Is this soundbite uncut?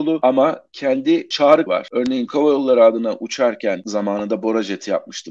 no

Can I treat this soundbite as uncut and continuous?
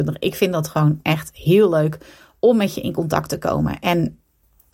yes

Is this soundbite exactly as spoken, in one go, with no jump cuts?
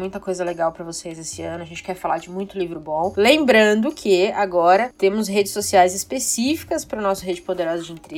yes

